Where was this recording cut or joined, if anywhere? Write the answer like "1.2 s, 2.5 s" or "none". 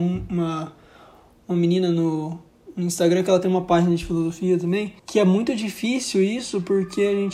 5.0 s